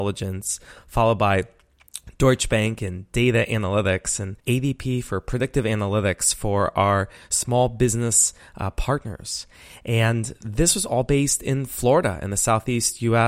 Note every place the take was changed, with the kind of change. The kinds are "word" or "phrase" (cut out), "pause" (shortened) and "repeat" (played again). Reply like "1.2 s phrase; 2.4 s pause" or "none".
4.4 s pause